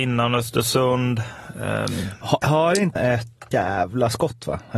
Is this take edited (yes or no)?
yes